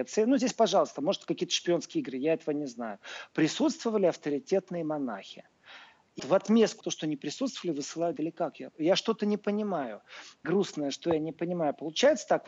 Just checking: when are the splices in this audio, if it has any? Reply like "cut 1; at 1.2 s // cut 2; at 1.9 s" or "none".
cut 1; at 6.2 s // cut 2; at 6.8 s // cut 3; at 8.2 s // cut 4; at 10.4 s